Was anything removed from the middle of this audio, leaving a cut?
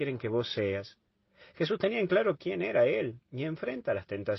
no; 0 cuts

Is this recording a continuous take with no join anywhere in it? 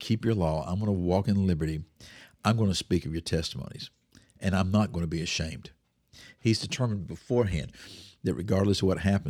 yes; 0 cuts

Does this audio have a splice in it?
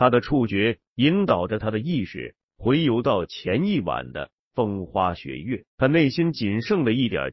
yes; 1 cut; at 5.7 s

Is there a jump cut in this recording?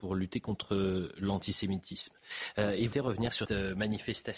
yes; 2 cuts; at 2.9 s, 3.4 s

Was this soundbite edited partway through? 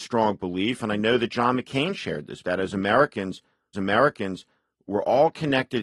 yes; 2 cuts; at 2.4 s, 3.7 s

